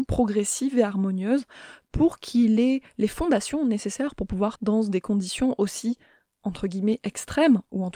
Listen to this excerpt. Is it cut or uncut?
cut